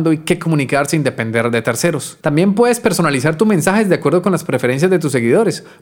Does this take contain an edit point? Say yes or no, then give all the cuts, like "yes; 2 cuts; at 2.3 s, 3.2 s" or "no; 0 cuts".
yes; 1 cut; at 2.2 s